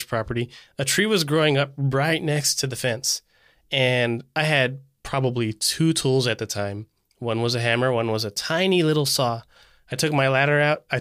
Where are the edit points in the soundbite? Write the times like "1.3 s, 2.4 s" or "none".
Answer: none